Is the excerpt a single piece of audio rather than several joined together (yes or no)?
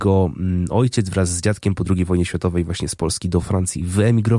yes